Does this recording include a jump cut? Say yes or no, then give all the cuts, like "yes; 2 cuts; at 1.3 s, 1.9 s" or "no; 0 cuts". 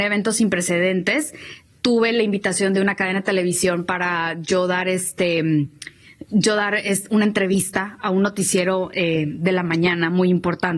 no; 0 cuts